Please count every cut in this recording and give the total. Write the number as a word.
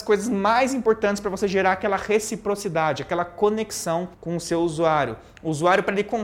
one